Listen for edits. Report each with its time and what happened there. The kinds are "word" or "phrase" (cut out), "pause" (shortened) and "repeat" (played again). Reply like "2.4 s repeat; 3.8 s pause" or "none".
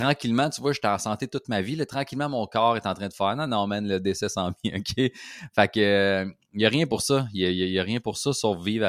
none

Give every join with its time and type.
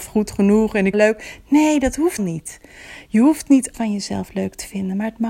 0.9 s phrase; 2.2 s word; 3.7 s word

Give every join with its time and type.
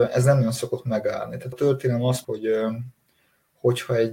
1.5 s word; 2.2 s word

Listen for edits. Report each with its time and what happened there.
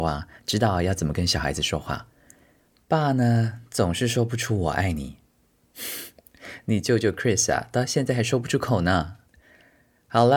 none

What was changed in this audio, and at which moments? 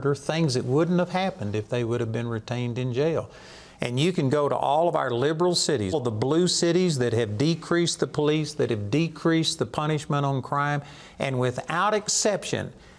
5.9 s word

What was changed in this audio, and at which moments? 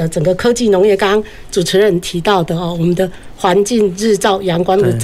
none

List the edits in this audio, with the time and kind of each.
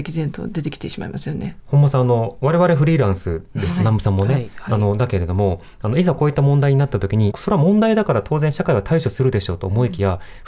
7.3 s phrase

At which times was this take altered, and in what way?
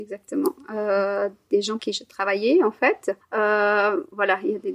1.8 s word; 3.2 s pause

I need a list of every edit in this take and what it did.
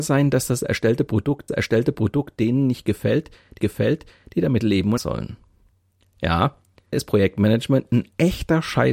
1.5 s repeat; 3.6 s repeat; 5.0 s word; 6.9 s word

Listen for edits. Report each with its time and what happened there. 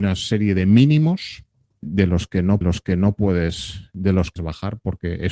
1.8 s word; 2.6 s repeat; 4.4 s phrase

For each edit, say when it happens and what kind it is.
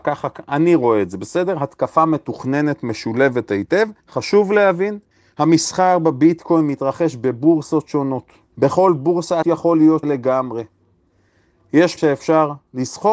4.0 s pause; 5.1 s pause; 8.5 s pause; 9.4 s word; 10.0 s word; 12.0 s phrase

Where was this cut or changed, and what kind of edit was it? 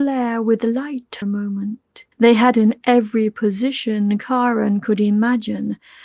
1.2 s word; 2.1 s pause; 2.5 s phrase

